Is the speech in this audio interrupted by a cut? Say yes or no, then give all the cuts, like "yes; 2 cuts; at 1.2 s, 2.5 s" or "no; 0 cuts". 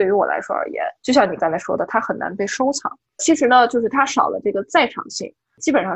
yes; 1 cut; at 1.0 s